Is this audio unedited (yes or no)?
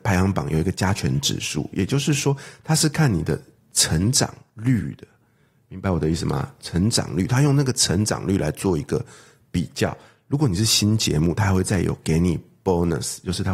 yes